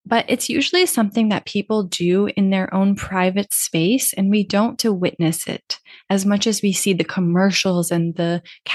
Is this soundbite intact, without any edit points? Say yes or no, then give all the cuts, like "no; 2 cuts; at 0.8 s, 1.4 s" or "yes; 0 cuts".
no; 1 cut; at 4.8 s